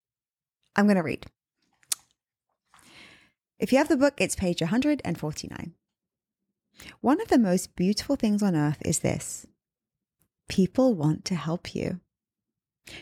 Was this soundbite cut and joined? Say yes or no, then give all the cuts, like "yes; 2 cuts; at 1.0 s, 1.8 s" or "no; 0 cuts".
no; 0 cuts